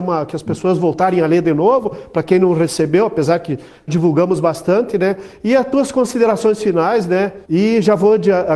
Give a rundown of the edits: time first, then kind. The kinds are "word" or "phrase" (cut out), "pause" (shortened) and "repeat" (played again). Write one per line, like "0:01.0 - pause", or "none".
0:03.9 - word
0:07.4 - pause